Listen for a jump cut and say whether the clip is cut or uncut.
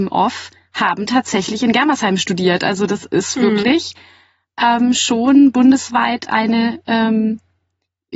uncut